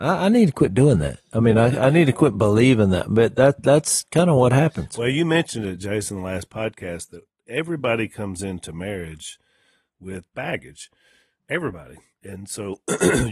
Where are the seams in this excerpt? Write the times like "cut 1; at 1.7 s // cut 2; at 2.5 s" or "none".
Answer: none

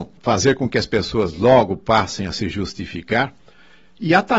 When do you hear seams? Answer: none

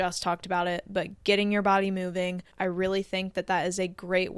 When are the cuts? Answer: cut 1; at 2.5 s

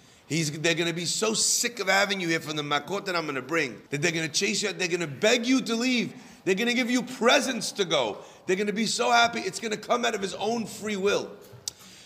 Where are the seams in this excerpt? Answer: cut 1; at 3.9 s

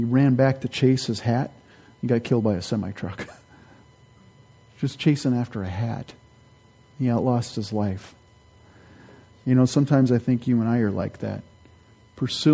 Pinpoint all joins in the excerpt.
none

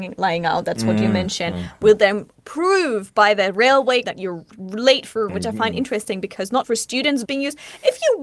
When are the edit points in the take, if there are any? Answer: cut 1; at 4.0 s // cut 2; at 5.3 s // cut 3; at 6.6 s // cut 4; at 7.2 s

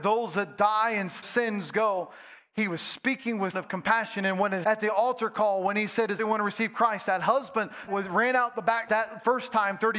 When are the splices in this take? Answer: cut 1; at 1.2 s // cut 2; at 3.5 s // cut 3; at 4.6 s // cut 4; at 6.2 s // cut 5; at 7.9 s // cut 6; at 8.9 s

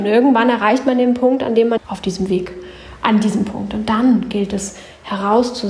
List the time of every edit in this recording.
cut 1; at 1.8 s

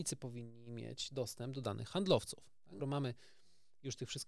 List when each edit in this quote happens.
cut 1; at 2.8 s

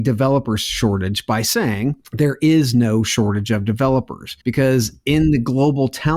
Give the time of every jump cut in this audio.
cut 1; at 4.4 s

